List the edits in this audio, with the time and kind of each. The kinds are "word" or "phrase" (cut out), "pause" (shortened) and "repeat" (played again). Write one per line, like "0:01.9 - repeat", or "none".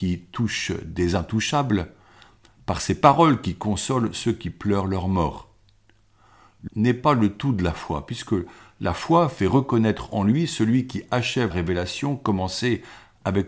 0:06.7 - word
0:11.5 - word